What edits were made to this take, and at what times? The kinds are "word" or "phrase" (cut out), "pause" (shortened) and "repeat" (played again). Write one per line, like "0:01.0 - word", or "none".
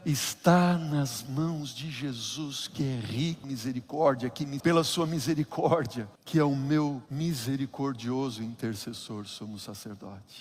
0:03.4 - word
0:04.6 - word
0:06.1 - pause
0:07.1 - pause